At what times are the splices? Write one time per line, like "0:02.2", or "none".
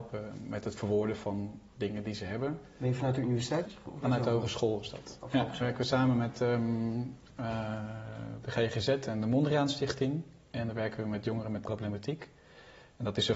0:03.6
0:04.0
0:05.6
0:11.6